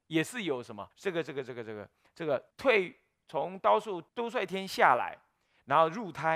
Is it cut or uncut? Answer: cut